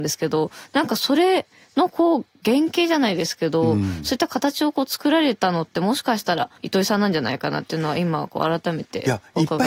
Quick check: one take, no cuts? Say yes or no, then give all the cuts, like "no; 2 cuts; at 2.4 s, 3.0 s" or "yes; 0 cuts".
no; 1 cut; at 6.6 s